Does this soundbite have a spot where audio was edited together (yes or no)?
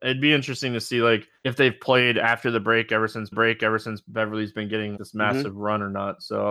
yes